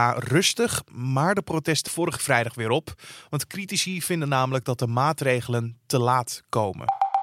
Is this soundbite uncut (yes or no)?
no